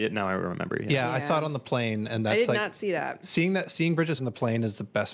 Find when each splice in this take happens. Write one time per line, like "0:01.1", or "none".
0:04.2